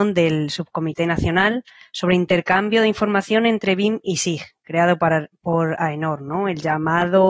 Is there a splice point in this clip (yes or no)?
no